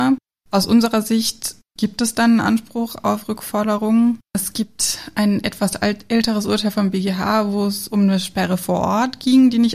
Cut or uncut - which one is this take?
uncut